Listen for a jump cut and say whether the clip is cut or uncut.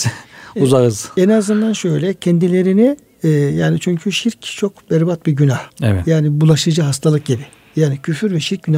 cut